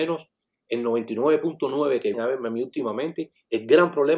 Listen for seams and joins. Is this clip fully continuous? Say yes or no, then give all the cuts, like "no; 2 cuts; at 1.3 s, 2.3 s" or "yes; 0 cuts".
no; 1 cut; at 2.1 s